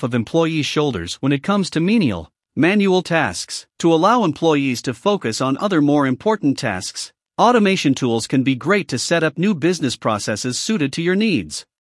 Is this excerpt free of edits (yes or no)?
no